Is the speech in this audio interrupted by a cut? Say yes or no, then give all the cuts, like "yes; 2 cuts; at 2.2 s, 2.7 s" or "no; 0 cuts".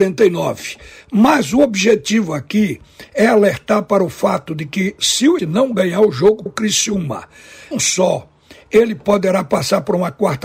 yes; 3 cuts; at 5.4 s, 6.5 s, 7.7 s